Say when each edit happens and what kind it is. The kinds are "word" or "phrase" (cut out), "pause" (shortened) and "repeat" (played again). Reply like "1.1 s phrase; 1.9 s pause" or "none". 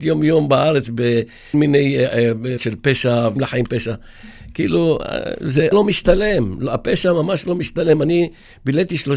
1.5 s word; 2.6 s word; 3.4 s word; 3.7 s word; 5.7 s word